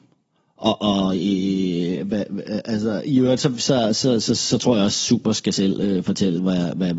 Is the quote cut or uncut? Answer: uncut